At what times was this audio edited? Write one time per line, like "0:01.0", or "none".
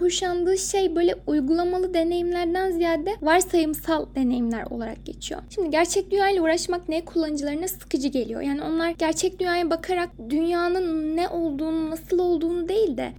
none